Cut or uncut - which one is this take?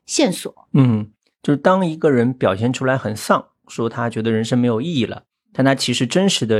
uncut